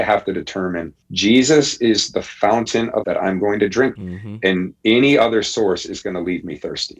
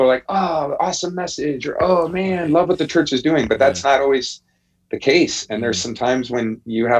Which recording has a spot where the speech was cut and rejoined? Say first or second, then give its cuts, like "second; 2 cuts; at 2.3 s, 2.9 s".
first; 4 cuts; at 1.0 s, 3.0 s, 4.0 s, 4.8 s